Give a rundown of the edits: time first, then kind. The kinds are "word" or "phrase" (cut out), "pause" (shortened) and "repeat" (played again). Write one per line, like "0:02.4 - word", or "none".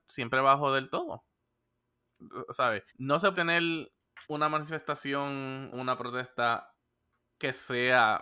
0:02.9 - pause
0:03.3 - word
0:04.2 - pause
0:05.7 - word